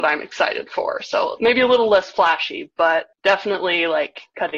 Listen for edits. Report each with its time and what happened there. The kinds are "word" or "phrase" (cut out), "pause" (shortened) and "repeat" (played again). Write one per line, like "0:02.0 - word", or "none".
0:03.1 - pause